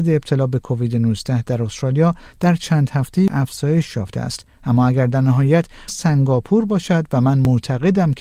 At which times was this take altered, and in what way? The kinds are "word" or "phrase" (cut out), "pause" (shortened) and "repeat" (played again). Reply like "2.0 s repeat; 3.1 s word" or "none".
3.3 s word; 5.9 s word